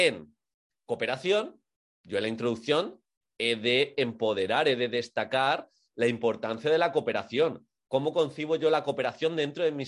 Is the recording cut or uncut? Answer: uncut